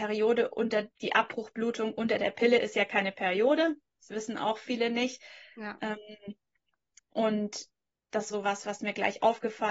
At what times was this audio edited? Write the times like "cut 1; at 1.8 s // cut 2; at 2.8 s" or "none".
cut 1; at 0.9 s // cut 2; at 8.3 s